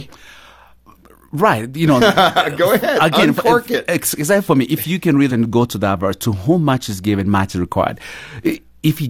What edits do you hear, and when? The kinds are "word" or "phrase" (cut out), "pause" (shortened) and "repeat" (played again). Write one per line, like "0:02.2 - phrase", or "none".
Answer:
0:05.3 - phrase